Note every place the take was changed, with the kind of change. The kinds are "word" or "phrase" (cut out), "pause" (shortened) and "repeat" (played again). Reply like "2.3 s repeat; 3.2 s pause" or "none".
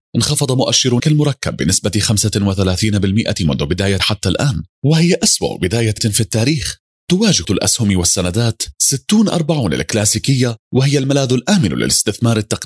1.0 s word; 4.0 s word; 6.0 s word; 7.4 s word